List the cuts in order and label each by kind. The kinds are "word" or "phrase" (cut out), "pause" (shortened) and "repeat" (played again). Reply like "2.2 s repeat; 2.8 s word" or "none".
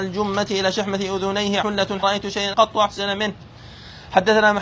1.6 s word; 2.0 s phrase; 2.5 s word